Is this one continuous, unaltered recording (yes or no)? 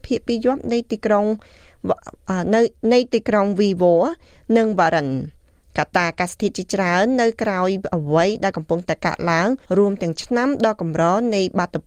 no